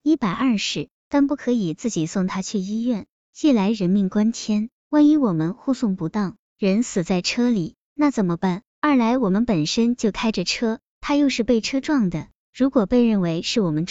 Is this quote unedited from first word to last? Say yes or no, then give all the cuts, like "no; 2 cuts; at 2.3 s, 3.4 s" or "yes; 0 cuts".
no; 1 cut; at 8.7 s